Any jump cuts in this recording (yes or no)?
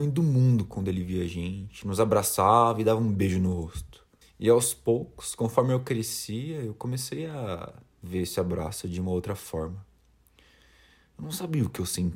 yes